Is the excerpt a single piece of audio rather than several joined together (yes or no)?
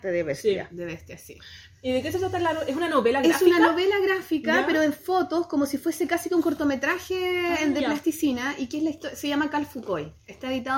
yes